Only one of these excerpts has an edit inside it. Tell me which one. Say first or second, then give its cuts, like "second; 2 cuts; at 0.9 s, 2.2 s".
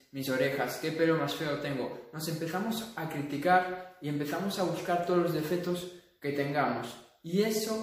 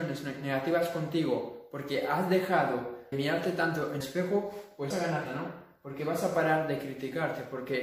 second; 4 cuts; at 3.1 s, 4.0 s, 4.9 s, 5.3 s